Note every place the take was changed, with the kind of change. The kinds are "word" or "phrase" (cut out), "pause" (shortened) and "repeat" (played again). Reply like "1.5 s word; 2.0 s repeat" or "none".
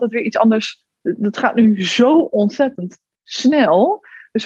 0.9 s pause